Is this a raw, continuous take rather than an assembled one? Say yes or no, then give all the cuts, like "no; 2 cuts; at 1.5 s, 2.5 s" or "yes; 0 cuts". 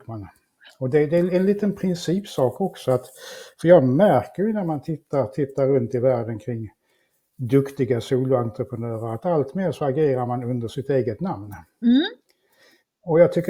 yes; 0 cuts